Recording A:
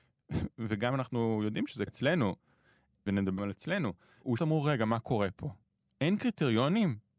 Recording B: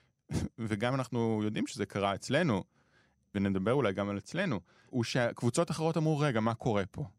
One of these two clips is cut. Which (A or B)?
A